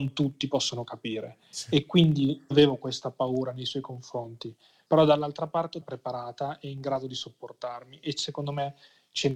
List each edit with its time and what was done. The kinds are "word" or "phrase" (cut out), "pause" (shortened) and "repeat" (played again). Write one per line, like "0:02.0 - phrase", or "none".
0:02.5 - word
0:05.8 - phrase